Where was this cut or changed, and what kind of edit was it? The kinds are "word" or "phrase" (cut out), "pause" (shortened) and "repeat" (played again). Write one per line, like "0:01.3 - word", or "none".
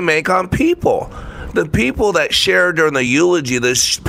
none